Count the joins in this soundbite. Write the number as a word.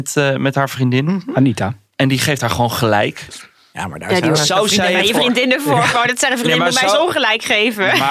zero